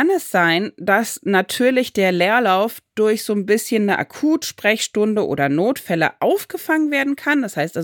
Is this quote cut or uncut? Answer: uncut